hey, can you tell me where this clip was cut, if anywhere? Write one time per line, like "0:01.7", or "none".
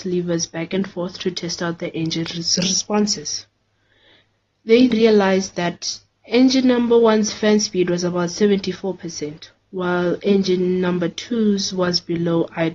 0:04.9